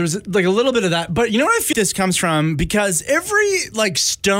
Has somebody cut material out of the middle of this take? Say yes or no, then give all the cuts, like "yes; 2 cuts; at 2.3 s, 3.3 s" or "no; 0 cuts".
yes; 1 cut; at 1.7 s